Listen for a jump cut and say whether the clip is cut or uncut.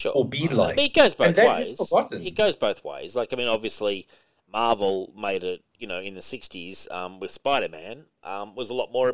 uncut